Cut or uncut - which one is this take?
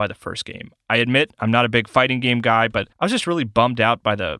cut